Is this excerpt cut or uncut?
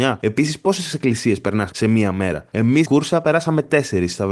cut